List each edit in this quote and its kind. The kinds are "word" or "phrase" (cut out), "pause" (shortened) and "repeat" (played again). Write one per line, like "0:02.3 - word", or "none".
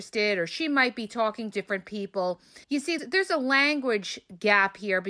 0:01.5 - phrase
0:02.6 - pause
0:03.0 - word